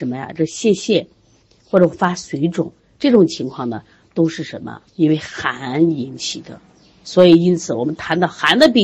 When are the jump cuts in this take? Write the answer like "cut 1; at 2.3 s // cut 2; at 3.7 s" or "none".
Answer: cut 1; at 4.9 s